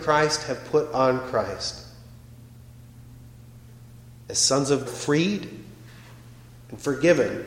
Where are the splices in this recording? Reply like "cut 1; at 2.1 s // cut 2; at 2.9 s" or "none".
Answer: cut 1; at 4.9 s